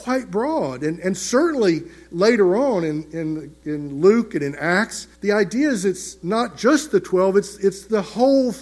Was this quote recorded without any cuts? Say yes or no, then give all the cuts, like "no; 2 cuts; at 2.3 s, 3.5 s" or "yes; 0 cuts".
no; 1 cut; at 5.1 s